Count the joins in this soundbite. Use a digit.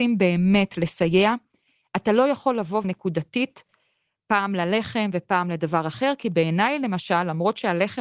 1